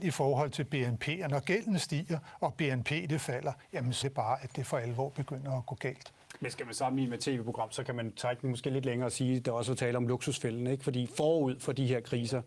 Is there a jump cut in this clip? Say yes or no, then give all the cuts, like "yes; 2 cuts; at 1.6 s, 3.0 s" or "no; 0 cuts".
yes; 1 cut; at 4.0 s